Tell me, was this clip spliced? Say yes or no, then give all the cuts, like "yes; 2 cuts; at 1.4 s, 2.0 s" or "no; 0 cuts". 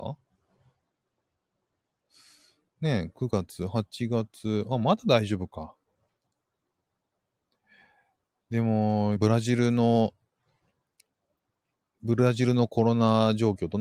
yes; 1 cut; at 9.2 s